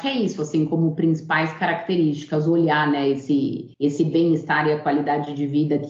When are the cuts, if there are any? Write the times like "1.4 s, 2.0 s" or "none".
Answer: 3.7 s